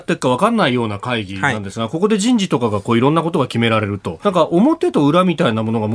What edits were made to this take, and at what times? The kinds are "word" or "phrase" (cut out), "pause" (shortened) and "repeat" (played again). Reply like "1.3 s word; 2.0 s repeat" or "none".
4.2 s phrase